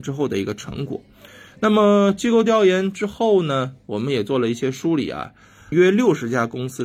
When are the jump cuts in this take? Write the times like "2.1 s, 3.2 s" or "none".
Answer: 5.7 s